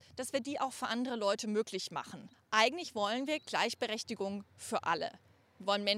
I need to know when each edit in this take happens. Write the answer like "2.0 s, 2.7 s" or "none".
2.3 s